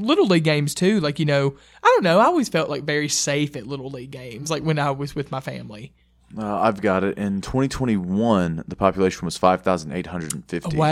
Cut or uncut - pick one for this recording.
uncut